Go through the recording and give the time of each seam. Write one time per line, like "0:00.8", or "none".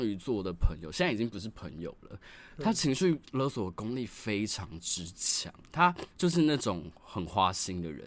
0:06.1